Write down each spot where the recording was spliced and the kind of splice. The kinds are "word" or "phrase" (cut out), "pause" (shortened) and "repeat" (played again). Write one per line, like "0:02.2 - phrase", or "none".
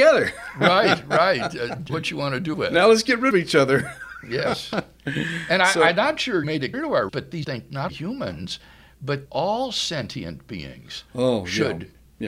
0:01.9 - word
0:02.5 - word
0:03.3 - word
0:06.4 - word
0:06.7 - word
0:07.1 - word
0:07.4 - word
0:07.9 - word
0:09.2 - word